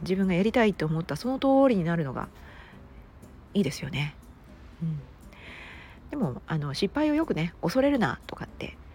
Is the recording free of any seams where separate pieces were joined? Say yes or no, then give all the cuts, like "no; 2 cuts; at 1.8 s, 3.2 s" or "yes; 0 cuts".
yes; 0 cuts